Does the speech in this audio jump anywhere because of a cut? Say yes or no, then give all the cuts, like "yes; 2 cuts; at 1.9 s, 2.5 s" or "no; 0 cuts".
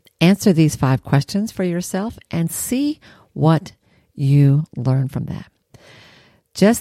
no; 0 cuts